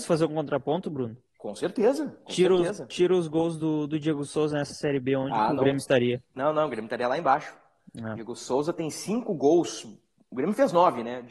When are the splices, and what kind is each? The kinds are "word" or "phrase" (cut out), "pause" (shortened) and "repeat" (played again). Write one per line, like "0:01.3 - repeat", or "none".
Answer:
none